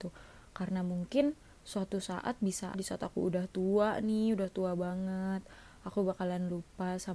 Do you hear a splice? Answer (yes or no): yes